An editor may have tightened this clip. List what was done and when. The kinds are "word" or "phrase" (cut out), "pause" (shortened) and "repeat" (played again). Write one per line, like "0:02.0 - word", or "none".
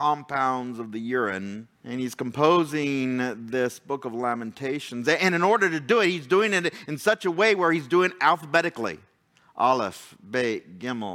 0:01.7 - pause

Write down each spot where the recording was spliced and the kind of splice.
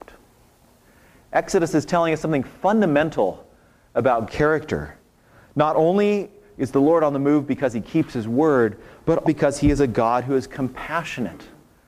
0:04.3 - word
0:09.2 - word

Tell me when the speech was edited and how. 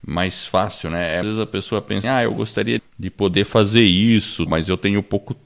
0:01.2 - word
0:02.0 - word
0:02.8 - word
0:04.5 - word

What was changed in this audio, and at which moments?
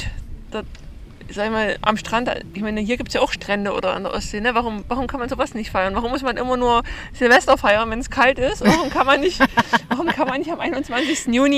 0:04.8 - word

